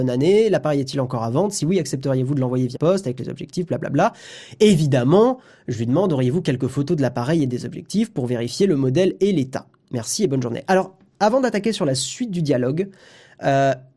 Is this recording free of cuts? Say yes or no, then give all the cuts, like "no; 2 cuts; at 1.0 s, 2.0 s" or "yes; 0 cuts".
no; 1 cut; at 2.7 s